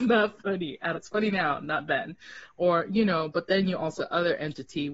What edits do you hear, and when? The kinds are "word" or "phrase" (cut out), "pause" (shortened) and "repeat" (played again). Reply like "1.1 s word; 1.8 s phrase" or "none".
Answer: 0.9 s word; 4.0 s word